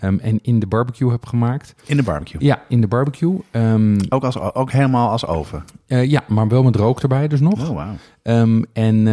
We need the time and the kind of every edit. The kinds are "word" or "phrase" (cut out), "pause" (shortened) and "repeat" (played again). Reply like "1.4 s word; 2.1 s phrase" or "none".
1.8 s pause

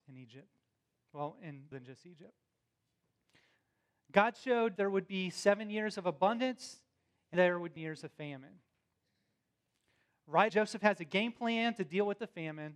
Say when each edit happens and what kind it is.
1.7 s word; 4.8 s word; 7.3 s word; 7.8 s word; 10.5 s word

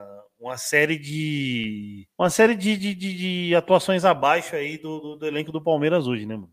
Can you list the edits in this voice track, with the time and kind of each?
2.1 s pause

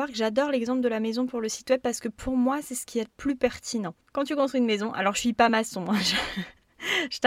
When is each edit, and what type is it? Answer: none

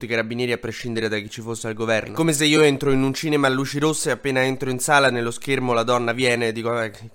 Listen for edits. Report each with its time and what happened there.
none

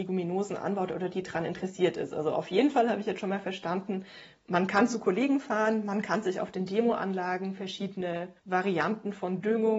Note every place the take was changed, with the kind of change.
8.4 s pause

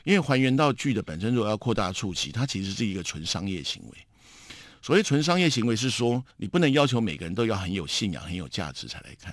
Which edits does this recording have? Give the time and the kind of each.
6.3 s pause

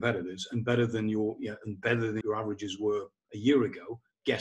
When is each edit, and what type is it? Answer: 2.2 s word

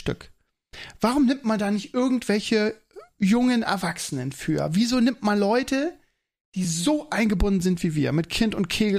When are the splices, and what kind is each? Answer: none

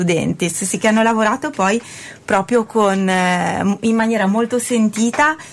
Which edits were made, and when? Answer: none

